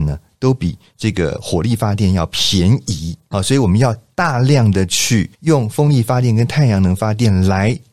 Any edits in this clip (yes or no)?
yes